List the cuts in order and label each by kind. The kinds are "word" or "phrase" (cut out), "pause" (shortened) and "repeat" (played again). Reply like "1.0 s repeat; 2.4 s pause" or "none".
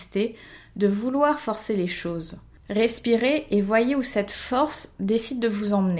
none